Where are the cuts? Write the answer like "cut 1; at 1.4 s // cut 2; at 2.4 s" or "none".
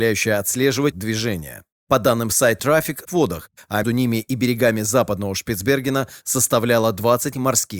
cut 1; at 0.9 s // cut 2; at 2.6 s // cut 3; at 3.0 s // cut 4; at 3.8 s